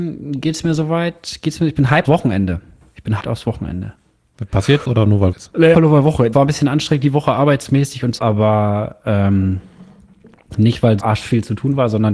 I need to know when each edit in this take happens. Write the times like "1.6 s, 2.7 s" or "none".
2.0 s, 3.2 s, 4.8 s, 5.3 s, 5.7 s, 6.3 s, 8.2 s, 11.0 s